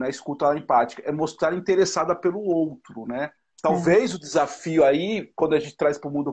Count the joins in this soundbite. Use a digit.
1